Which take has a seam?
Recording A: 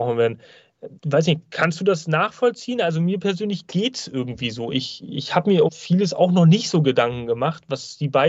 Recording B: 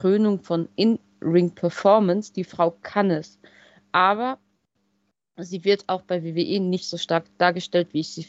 A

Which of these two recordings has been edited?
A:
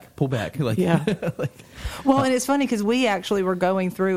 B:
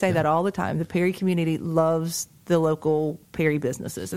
B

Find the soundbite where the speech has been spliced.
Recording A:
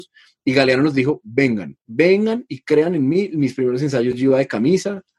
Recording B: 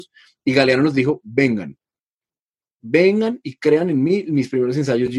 A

